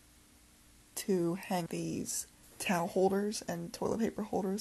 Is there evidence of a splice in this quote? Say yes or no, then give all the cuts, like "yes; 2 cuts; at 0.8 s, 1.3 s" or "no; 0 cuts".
yes; 3 cuts; at 0.9 s, 1.7 s, 2.4 s